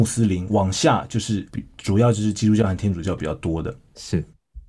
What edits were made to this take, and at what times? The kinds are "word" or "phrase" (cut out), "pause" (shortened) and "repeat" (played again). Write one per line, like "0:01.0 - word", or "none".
0:01.5 - pause